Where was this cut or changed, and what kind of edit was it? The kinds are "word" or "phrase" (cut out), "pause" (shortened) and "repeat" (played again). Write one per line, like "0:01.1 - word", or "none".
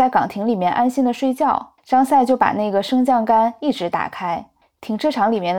0:01.8 - pause
0:04.6 - pause